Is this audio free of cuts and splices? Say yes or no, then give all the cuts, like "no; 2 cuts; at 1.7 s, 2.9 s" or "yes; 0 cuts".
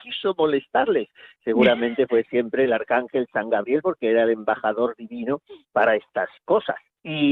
yes; 0 cuts